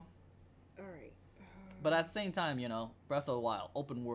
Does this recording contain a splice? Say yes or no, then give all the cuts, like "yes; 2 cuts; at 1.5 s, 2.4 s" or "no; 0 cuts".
yes; 1 cut; at 1.3 s